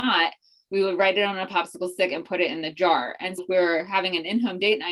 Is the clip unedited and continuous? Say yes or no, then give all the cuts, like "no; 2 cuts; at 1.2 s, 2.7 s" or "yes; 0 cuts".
no; 1 cut; at 3.4 s